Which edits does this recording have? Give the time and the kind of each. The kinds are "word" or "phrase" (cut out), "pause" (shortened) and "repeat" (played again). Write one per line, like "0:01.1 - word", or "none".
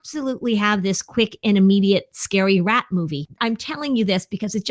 none